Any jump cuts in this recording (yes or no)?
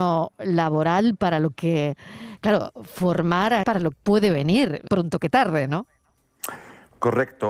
yes